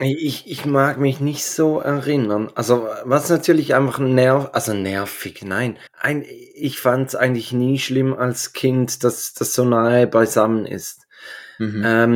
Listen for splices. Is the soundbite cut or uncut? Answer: cut